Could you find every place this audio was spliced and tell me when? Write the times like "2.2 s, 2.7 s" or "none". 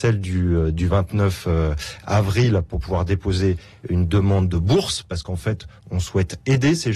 none